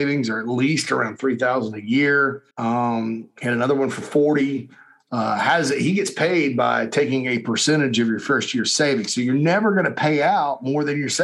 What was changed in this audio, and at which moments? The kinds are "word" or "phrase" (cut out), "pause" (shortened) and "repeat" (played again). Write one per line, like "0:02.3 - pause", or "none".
0:02.5 - pause

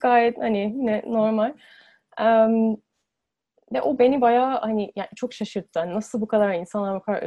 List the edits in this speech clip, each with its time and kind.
none

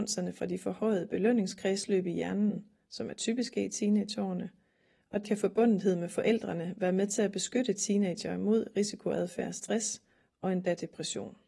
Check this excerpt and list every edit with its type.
0:05.2 - word

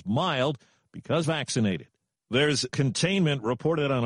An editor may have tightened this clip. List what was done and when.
0:01.2 - phrase
0:02.7 - word

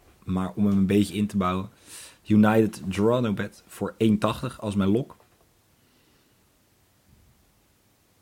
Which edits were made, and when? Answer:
none

